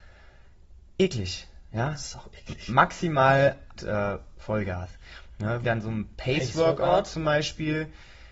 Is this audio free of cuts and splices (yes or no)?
no